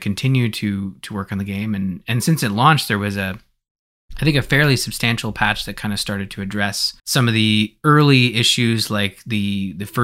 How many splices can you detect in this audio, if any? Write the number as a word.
one